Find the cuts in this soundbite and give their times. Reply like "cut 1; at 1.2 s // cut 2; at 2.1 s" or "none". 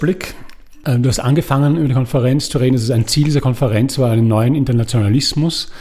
none